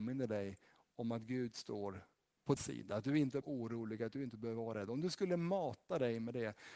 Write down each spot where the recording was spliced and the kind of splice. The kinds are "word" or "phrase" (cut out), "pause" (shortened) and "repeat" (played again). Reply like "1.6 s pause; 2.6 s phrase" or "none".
2.6 s word; 3.4 s phrase